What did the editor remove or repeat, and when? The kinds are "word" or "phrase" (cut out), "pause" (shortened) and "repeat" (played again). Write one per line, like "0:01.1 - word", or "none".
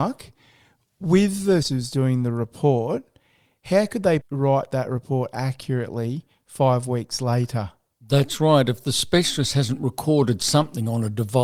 0:01.6 - word
0:04.2 - word

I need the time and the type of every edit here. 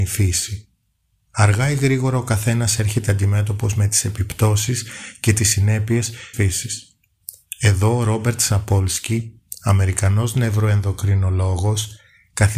0:06.3 - phrase

